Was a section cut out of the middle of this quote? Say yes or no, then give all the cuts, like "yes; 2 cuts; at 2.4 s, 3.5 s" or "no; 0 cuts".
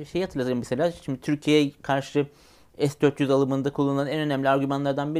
no; 0 cuts